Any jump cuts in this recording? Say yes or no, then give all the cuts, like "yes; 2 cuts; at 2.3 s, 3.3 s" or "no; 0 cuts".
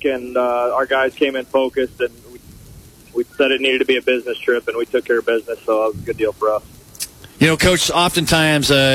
no; 0 cuts